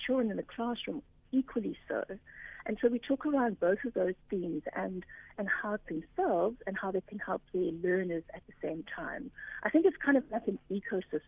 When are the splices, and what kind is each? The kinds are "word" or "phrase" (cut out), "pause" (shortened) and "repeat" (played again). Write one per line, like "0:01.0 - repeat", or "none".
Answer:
0:05.8 - phrase